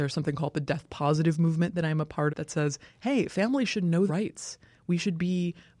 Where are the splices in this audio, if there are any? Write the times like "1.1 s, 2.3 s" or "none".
2.3 s, 4.1 s

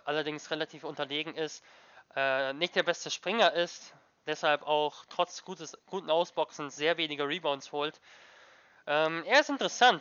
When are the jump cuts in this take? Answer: none

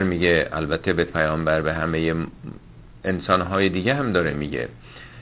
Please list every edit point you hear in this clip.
1.1 s

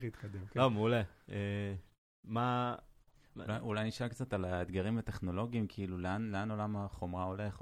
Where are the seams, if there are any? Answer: none

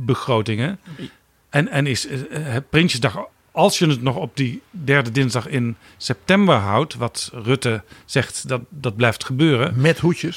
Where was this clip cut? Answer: none

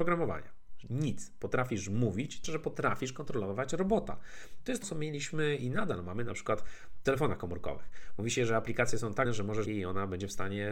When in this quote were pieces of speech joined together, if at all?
2.4 s, 4.8 s, 7.1 s, 9.3 s, 9.7 s

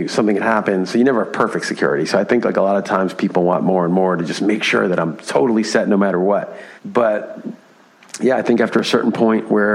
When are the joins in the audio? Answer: 6.8 s

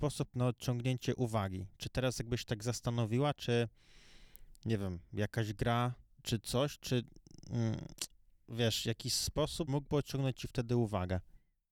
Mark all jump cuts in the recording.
6.2 s, 9.7 s

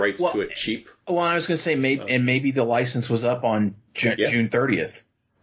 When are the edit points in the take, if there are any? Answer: 3.9 s

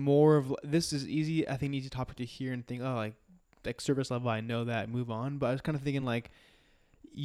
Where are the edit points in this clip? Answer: none

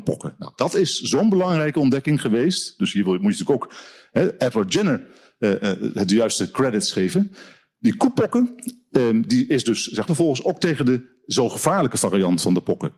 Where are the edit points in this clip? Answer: 10.1 s

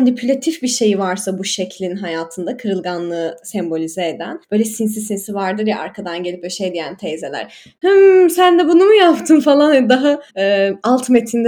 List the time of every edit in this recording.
4.4 s, 10.3 s

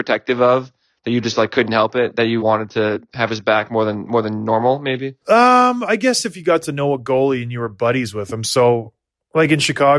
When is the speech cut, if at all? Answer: 2.4 s, 5.2 s

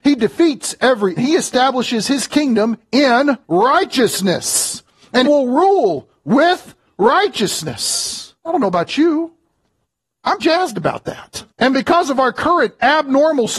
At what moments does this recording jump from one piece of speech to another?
1.2 s, 3.4 s, 5.2 s, 8.4 s, 10.4 s, 11.5 s

